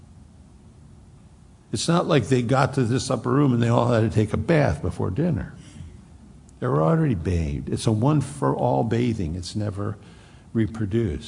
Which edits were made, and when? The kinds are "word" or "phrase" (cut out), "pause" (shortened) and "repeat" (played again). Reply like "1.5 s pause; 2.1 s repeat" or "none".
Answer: none